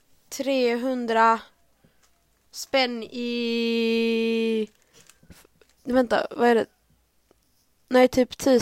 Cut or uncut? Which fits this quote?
uncut